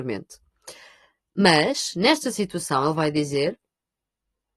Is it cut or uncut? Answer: uncut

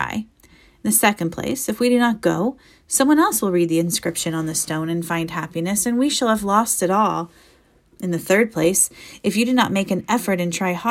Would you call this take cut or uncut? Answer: uncut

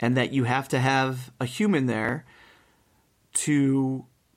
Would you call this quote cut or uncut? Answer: uncut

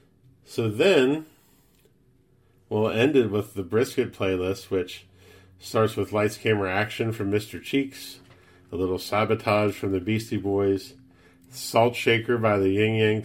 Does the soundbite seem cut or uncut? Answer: uncut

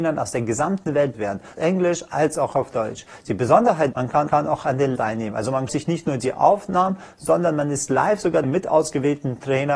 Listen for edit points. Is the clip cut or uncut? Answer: cut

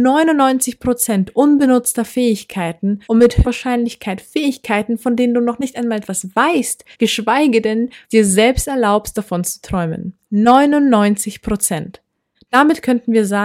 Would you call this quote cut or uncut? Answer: cut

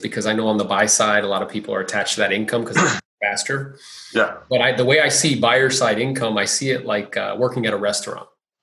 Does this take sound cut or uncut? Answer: uncut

